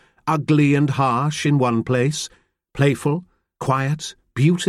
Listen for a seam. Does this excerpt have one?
no; 0 cuts

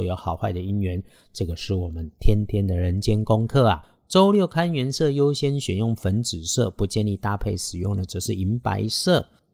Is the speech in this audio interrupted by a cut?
no; 0 cuts

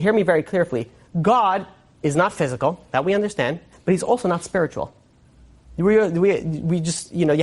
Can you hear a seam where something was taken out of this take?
no; 0 cuts

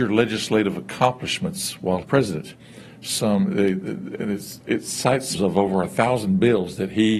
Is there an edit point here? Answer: yes; 2 cuts; at 2.0 s, 5.3 s

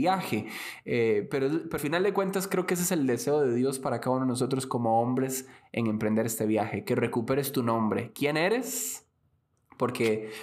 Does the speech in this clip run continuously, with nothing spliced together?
no; 1 cut; at 1.8 s

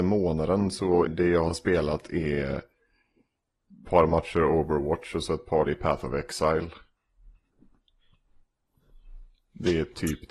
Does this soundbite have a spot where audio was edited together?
yes; 3 cuts; at 1.1 s, 3.8 s, 5.7 s

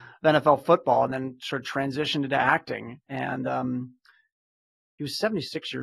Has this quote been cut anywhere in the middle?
no; 0 cuts

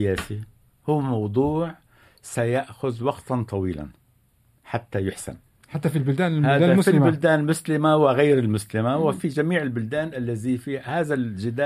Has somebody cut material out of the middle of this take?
no; 0 cuts

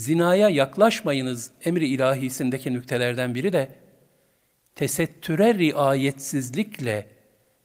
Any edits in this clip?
no; 0 cuts

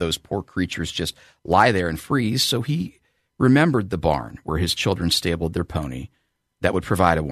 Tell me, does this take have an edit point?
no; 0 cuts

